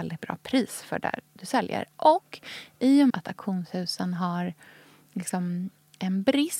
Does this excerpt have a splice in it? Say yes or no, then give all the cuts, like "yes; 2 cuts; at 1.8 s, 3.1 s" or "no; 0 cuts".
yes; 1 cut; at 3.1 s